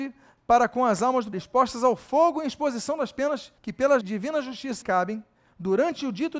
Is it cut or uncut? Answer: cut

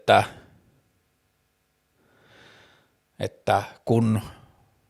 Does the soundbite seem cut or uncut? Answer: uncut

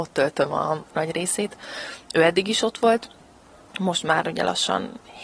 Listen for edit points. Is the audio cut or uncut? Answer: cut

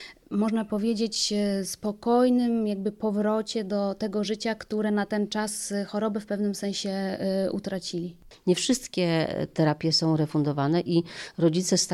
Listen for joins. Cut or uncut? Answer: uncut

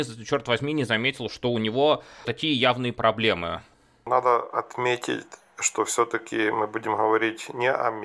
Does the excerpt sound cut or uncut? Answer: uncut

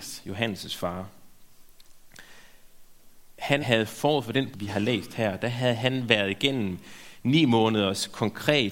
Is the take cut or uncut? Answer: cut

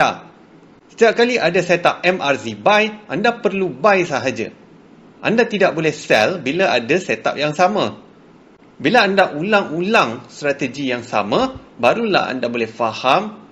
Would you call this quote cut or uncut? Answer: uncut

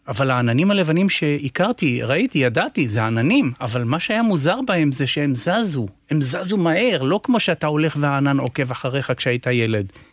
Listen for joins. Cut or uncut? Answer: uncut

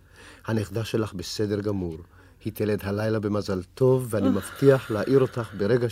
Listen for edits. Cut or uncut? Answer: uncut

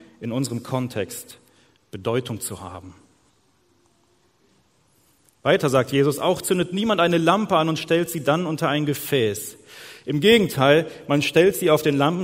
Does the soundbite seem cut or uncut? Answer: uncut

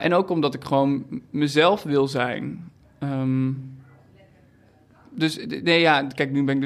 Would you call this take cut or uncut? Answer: uncut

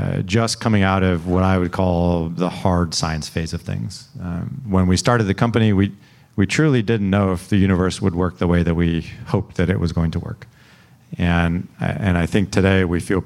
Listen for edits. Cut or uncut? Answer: uncut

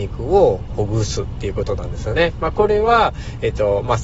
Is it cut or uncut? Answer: uncut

